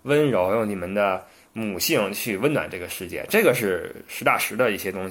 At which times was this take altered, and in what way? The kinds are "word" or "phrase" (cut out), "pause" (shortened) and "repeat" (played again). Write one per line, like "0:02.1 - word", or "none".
none